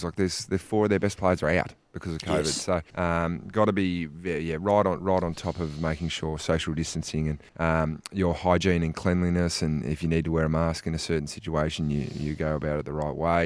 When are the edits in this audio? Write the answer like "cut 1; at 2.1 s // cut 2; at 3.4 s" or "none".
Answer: cut 1; at 2.9 s // cut 2; at 7.5 s